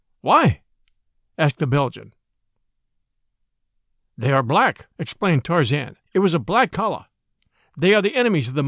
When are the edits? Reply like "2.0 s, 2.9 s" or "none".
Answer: 4.9 s, 6.0 s, 6.7 s